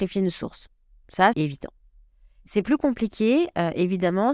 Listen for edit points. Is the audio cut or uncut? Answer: cut